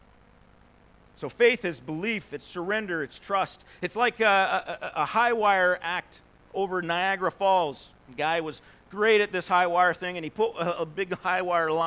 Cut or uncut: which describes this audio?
uncut